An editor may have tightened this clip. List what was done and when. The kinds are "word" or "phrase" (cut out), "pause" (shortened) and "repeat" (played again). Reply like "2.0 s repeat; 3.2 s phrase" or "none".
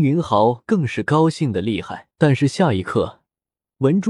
2.1 s pause